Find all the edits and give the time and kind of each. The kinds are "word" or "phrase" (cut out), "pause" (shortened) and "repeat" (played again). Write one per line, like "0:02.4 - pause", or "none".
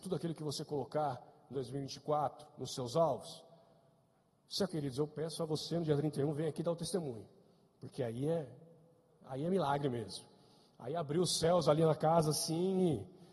0:01.5 - word
0:04.7 - word